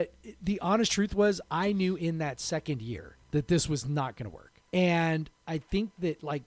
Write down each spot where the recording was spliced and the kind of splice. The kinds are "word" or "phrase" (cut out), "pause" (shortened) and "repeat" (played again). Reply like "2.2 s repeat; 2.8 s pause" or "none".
3.2 s pause; 4.7 s pause